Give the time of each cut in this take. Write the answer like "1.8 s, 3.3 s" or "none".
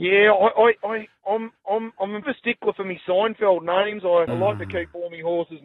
1.6 s, 2.2 s, 4.3 s